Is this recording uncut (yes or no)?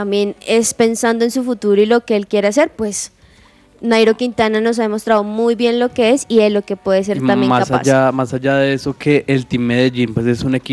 yes